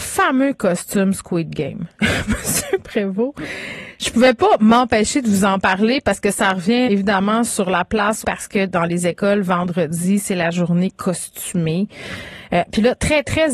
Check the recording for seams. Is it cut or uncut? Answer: cut